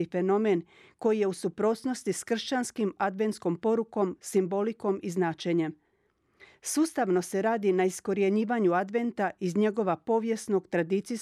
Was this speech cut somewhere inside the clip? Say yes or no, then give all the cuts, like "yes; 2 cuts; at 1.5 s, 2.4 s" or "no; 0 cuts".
no; 0 cuts